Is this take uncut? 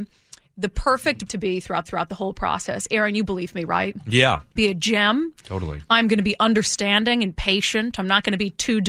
no; 3 cuts; at 1.3 s, 1.9 s, 4.6 s

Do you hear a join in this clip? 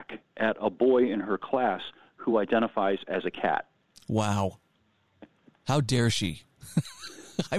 no; 0 cuts

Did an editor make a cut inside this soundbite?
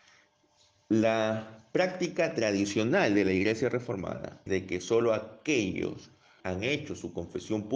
yes; 2 cuts; at 4.5 s, 6.4 s

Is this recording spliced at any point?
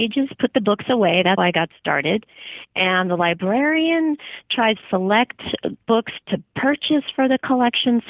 yes; 3 cuts; at 1.4 s, 4.8 s, 6.2 s

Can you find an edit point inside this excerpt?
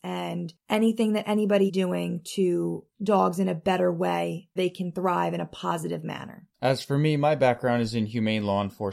yes; 4 cuts; at 1.7 s, 2.9 s, 4.6 s, 6.5 s

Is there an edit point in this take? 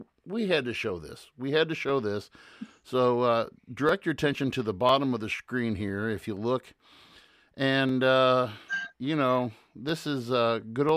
no; 0 cuts

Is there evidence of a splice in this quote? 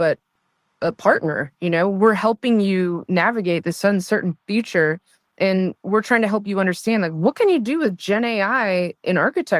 no; 0 cuts

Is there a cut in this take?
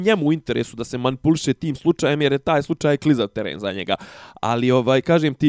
no; 0 cuts

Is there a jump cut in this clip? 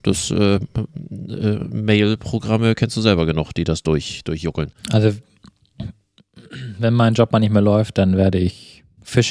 yes; 1 cut; at 4.8 s

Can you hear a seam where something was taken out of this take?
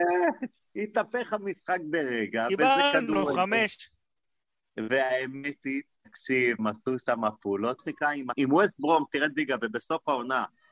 yes; 3 cuts; at 6.6 s, 7.8 s, 8.3 s

